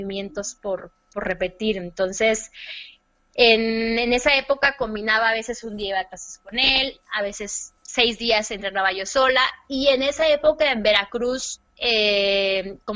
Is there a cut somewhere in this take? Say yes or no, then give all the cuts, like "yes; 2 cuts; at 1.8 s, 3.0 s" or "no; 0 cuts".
yes; 2 cuts; at 7.8 s, 11.7 s